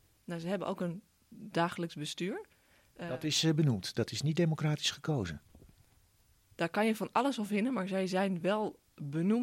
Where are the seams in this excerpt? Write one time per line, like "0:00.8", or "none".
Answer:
none